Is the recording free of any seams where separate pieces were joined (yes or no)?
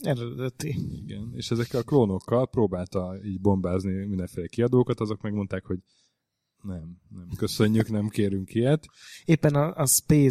yes